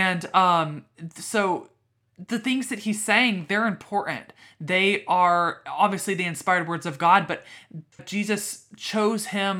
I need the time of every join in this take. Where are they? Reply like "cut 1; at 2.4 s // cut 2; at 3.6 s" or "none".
cut 1; at 8.0 s

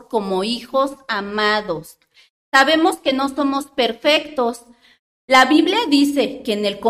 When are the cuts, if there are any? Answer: none

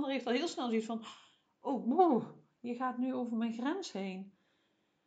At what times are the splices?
none

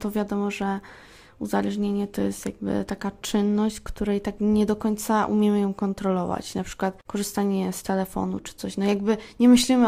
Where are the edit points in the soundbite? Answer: none

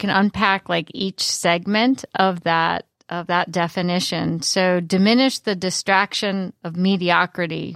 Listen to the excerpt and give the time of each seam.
none

